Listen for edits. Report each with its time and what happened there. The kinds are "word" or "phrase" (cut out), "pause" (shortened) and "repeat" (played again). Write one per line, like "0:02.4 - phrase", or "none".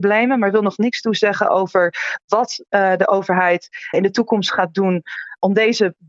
0:03.9 - word